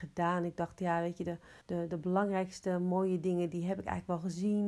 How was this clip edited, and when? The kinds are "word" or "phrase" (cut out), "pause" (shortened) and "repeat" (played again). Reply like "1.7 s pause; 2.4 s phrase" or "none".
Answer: 1.6 s pause